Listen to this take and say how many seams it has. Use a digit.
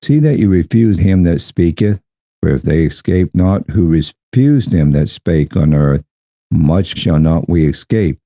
3